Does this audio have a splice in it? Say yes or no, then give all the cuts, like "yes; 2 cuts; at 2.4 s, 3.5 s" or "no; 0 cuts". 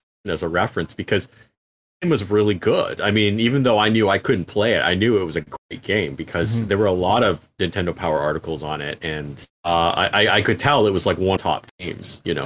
yes; 2 cuts; at 9.5 s, 11.4 s